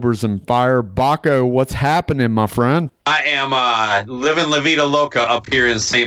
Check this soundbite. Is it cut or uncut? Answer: cut